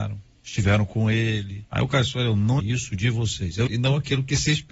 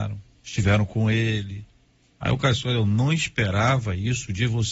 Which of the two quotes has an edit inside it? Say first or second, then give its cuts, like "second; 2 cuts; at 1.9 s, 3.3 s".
first; 3 cuts; at 1.7 s, 2.6 s, 3.7 s